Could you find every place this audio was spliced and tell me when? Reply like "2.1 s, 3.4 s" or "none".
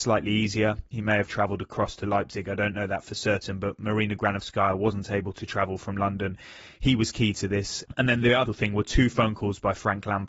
8.5 s